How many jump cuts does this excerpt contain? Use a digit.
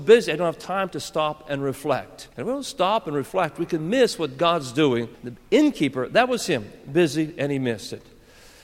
2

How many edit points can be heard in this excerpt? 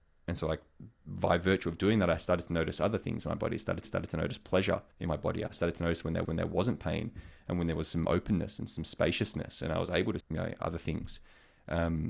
5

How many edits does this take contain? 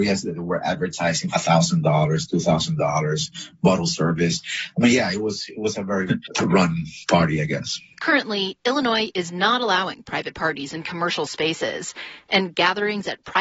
2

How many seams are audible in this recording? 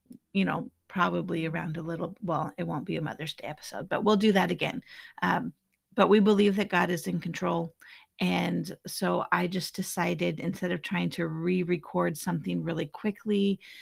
0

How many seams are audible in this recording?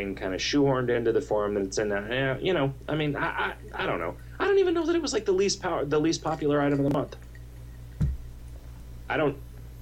0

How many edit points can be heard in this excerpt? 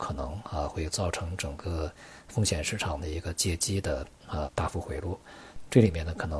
1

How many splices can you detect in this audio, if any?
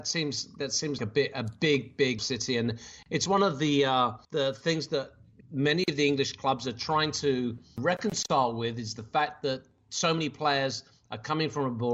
6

